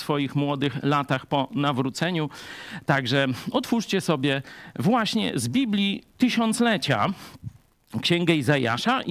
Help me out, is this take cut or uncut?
uncut